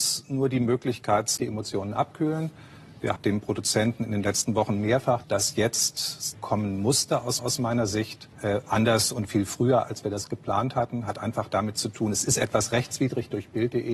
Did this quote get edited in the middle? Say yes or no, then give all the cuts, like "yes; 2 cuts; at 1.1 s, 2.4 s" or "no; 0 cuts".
yes; 6 cuts; at 1.4 s, 3.2 s, 5.2 s, 6.3 s, 7.4 s, 8.3 s